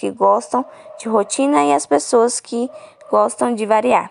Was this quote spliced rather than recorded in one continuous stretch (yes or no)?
no